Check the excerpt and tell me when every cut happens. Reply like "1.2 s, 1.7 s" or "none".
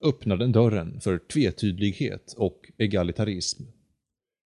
none